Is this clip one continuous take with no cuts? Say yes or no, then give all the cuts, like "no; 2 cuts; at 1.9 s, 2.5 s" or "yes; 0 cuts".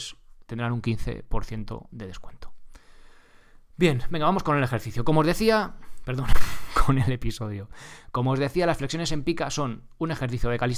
yes; 0 cuts